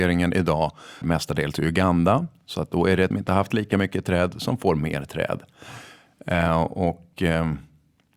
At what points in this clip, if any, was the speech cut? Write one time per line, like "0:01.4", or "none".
0:01.0
0:03.1